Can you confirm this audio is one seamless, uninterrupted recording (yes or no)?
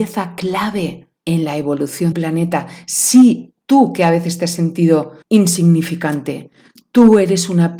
no